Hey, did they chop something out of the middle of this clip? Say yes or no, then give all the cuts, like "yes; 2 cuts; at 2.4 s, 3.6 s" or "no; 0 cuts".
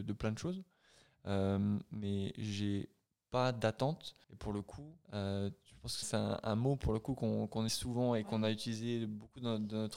yes; 4 cuts; at 4.2 s, 5.0 s, 6.0 s, 7.7 s